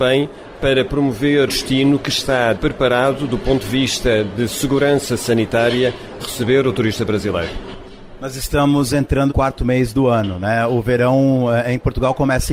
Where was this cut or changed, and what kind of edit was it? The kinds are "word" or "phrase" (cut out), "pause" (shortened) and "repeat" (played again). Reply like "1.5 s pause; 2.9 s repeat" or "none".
1.5 s word; 2.5 s word; 6.2 s word; 9.3 s word